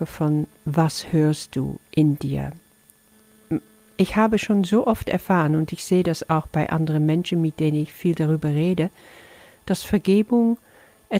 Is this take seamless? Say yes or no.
yes